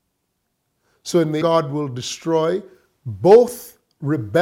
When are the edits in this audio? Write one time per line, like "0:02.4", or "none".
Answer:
0:01.4